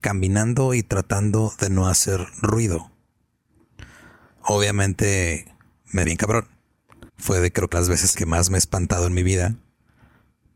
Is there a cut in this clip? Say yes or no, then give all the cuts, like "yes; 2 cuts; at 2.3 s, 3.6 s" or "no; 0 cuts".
yes; 4 cuts; at 6.0 s, 7.1 s, 7.7 s, 8.1 s